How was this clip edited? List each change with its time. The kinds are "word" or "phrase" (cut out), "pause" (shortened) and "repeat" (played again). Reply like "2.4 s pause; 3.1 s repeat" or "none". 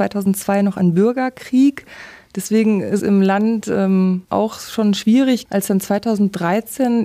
3.0 s word; 4.2 s pause; 5.5 s word